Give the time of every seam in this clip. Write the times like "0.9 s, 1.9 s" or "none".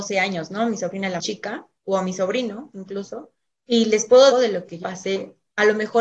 1.2 s, 3.5 s, 4.3 s, 4.8 s

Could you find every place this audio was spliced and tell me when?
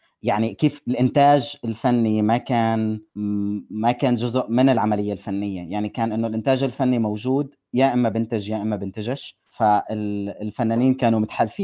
3.1 s, 9.5 s

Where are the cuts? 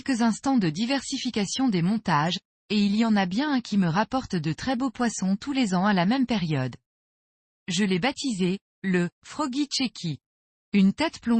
none

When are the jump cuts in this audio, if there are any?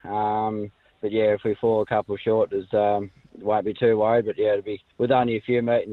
4.9 s

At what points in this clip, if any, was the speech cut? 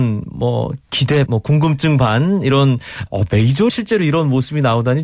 1.3 s, 3.1 s, 3.7 s

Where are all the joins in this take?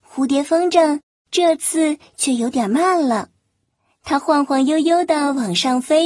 none

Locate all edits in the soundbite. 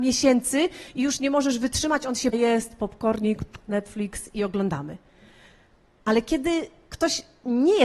2.3 s

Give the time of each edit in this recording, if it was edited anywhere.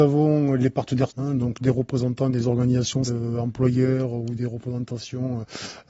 1.1 s, 3.1 s

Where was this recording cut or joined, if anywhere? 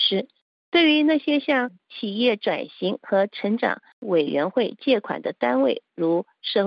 none

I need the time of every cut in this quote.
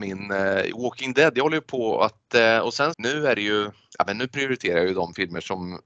2.9 s

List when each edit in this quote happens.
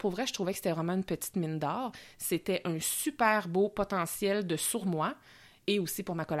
4.8 s

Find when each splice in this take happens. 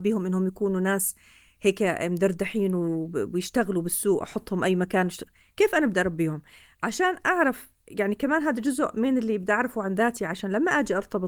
none

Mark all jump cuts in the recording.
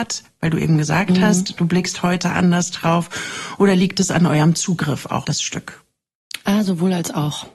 5.2 s

